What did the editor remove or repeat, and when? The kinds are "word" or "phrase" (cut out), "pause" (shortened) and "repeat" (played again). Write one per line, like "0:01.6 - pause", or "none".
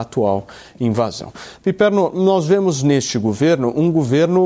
none

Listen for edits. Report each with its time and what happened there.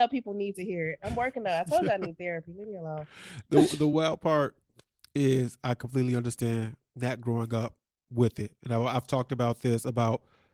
none

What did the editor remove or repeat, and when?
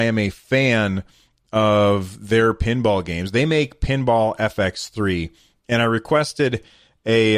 none

